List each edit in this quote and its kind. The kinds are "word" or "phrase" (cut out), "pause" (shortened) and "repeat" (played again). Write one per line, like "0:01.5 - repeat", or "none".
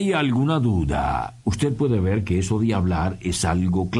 0:01.4 - pause